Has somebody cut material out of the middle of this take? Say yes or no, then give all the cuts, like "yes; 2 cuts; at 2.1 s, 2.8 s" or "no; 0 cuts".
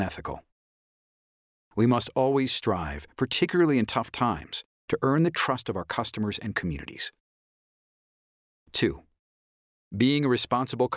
no; 0 cuts